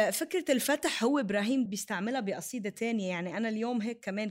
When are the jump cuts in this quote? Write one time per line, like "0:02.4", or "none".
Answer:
0:01.7